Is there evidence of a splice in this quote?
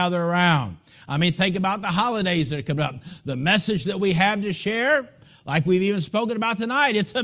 no; 0 cuts

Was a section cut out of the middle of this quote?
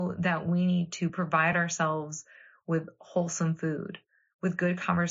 no; 0 cuts

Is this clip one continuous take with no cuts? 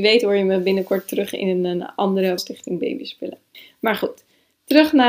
no; 1 cut; at 2.4 s

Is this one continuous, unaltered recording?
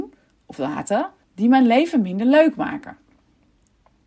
no; 1 cut; at 1.2 s

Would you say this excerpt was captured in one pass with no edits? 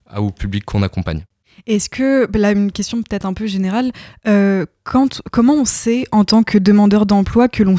yes; 0 cuts

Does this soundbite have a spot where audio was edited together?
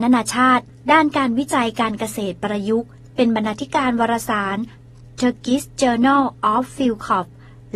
no; 0 cuts

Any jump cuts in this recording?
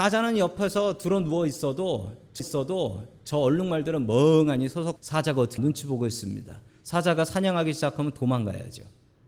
yes; 3 cuts; at 2.4 s, 5.0 s, 5.6 s

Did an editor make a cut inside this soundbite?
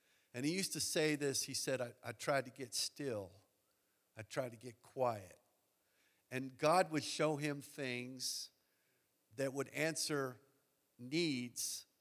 no; 0 cuts

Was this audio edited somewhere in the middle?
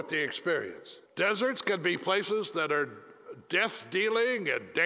yes; 1 cut; at 1.1 s

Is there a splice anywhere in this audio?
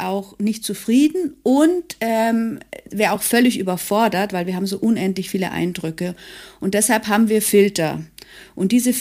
no; 0 cuts

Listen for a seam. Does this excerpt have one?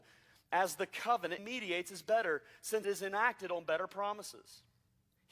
yes; 2 cuts; at 1.4 s, 2.8 s

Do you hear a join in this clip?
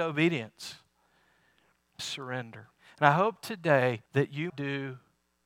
yes; 4 cuts; at 2.0 s, 2.8 s, 4.1 s, 4.5 s

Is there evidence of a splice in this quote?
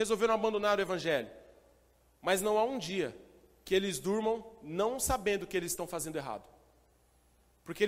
no; 0 cuts

